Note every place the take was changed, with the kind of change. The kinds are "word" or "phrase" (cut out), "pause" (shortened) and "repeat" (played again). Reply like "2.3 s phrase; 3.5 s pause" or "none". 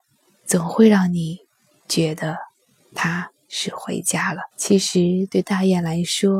4.5 s pause